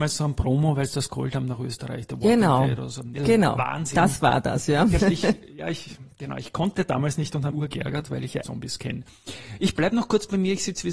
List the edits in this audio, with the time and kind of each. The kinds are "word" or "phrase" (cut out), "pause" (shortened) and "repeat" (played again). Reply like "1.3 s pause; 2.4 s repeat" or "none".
3.2 s word; 5.0 s word; 7.5 s word; 8.4 s word